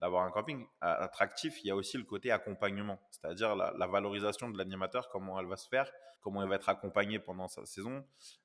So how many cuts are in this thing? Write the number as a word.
one